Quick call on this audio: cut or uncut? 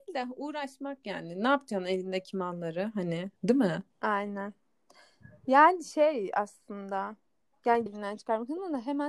cut